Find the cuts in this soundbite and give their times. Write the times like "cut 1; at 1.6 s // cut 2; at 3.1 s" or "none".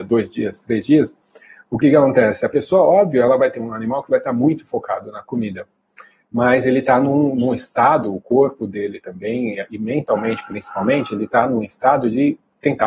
none